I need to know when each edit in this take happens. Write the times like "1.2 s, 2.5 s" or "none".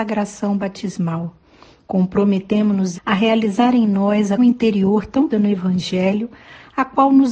2.9 s, 4.4 s, 5.3 s